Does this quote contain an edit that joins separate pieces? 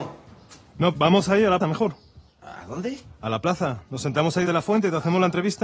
yes; 3 cuts; at 0.9 s, 1.6 s, 4.5 s

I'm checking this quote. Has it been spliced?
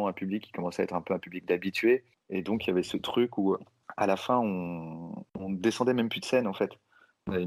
yes; 1 cut; at 5.3 s

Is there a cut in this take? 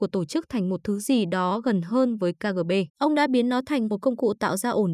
yes; 1 cut; at 2.9 s

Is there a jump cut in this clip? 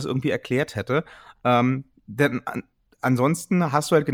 no; 0 cuts

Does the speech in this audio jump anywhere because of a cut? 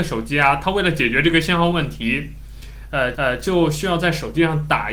yes; 1 cut; at 3.1 s

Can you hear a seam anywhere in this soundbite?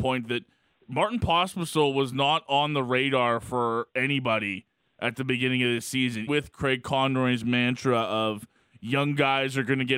yes; 1 cut; at 6.3 s

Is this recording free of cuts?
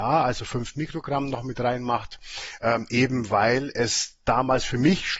yes; 0 cuts

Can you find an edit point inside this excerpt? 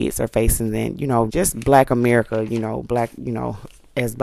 yes; 1 cut; at 1.3 s

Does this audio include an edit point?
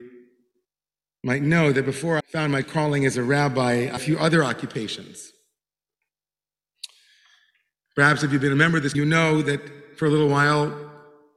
yes; 4 cuts; at 2.2 s, 2.6 s, 4.0 s, 8.9 s

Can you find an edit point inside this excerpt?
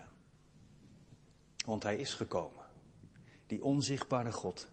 no; 0 cuts

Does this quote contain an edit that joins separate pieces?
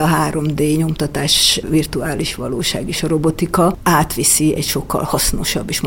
no; 0 cuts

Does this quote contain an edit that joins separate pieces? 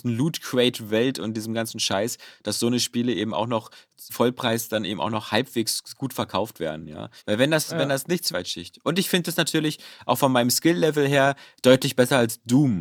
yes; 3 cuts; at 4.1 s, 7.2 s, 8.3 s

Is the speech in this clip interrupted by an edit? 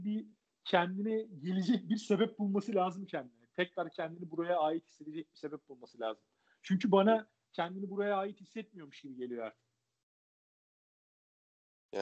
no; 0 cuts

